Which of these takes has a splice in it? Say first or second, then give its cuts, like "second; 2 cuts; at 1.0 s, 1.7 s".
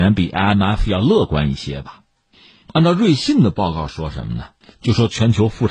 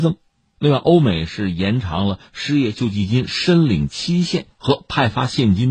first; 1 cut; at 4.6 s